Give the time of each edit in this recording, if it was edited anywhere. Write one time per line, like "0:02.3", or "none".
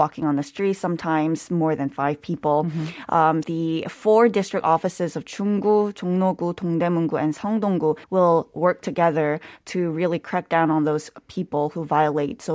0:03.4
0:08.0